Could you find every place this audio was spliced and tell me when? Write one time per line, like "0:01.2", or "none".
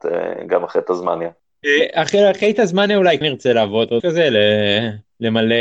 0:03.2
0:04.0